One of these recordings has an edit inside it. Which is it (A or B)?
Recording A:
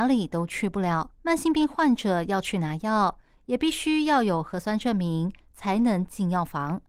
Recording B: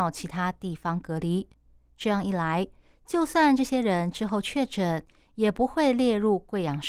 A